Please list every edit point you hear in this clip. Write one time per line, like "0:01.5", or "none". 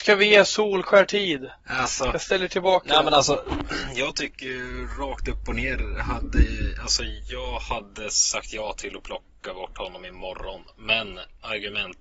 0:01.6